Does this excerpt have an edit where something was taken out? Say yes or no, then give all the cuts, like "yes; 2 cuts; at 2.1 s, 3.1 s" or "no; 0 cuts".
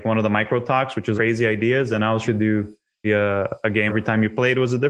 yes; 4 cuts; at 1.2 s, 2.2 s, 3.0 s, 3.9 s